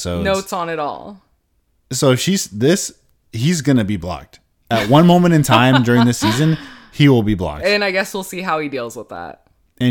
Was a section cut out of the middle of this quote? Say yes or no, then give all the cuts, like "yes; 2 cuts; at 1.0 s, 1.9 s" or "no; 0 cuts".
no; 0 cuts